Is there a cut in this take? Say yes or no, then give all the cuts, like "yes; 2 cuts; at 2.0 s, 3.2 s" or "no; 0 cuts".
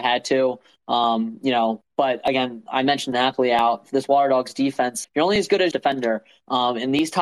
yes; 3 cuts; at 3.1 s, 5.0 s, 5.7 s